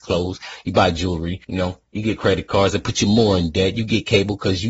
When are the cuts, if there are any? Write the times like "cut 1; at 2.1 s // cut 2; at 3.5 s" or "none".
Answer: cut 1; at 1.4 s